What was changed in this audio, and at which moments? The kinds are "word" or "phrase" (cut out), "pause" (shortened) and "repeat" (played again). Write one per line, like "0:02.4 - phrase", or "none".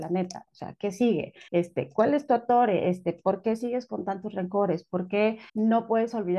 0:01.5 - pause
0:05.5 - pause